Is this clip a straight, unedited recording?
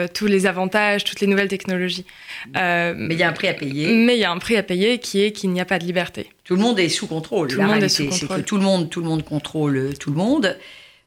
yes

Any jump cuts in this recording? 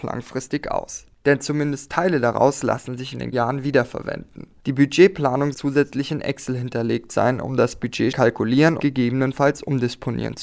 yes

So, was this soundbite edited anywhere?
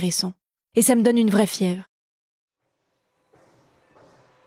no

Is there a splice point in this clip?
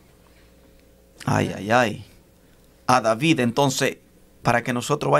no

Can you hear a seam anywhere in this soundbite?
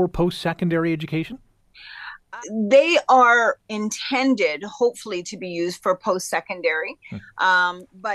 yes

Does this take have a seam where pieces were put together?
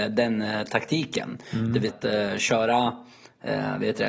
yes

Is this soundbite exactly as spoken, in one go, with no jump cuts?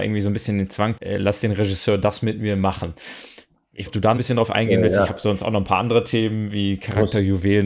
no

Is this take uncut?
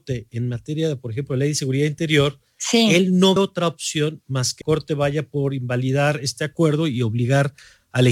no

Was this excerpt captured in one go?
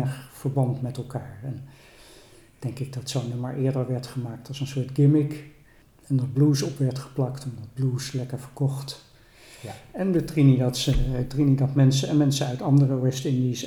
yes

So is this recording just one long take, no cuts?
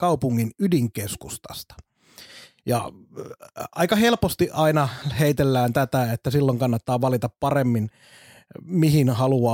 yes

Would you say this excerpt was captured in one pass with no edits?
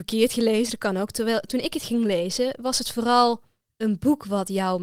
no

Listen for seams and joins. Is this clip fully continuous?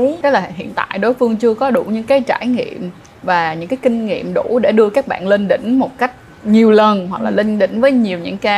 yes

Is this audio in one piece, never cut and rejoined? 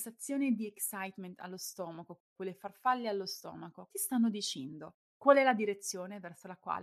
no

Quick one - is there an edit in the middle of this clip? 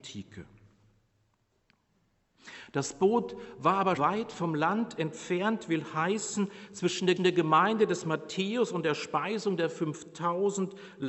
yes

